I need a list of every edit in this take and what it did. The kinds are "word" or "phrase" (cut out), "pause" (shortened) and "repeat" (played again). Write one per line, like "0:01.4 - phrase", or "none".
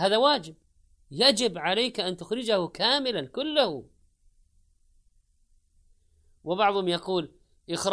none